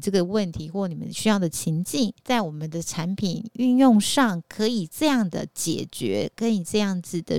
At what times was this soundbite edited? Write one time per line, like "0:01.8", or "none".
0:02.2